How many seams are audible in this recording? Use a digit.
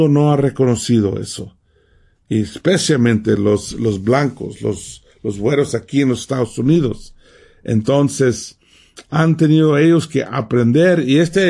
0